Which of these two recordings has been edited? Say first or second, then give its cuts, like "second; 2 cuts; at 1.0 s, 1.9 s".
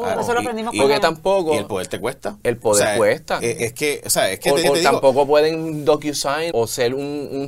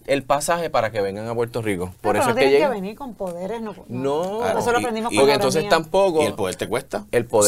first; 4 cuts; at 1.0 s, 3.4 s, 4.6 s, 6.5 s